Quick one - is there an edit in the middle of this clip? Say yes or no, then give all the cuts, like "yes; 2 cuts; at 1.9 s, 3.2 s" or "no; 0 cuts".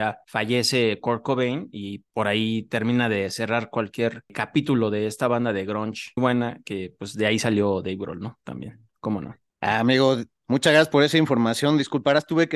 yes; 1 cut; at 6.2 s